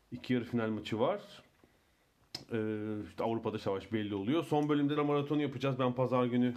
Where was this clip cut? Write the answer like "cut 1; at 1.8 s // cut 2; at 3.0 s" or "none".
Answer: cut 1; at 3.6 s // cut 2; at 5.0 s